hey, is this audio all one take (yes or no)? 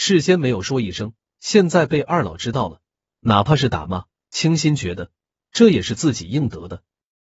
yes